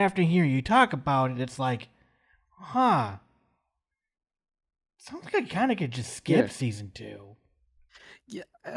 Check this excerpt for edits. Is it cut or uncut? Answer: uncut